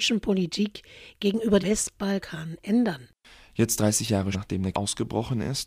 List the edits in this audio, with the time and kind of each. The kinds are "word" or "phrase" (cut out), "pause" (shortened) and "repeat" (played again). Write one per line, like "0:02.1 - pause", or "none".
0:01.6 - word
0:04.3 - word
0:04.7 - word